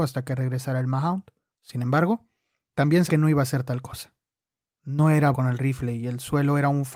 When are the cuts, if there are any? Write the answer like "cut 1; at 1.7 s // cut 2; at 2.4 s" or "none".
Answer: cut 1; at 3.1 s // cut 2; at 5.3 s